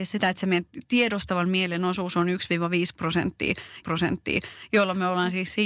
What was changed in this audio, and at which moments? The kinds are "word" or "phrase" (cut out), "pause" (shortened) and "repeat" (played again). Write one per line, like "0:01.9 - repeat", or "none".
0:03.8 - repeat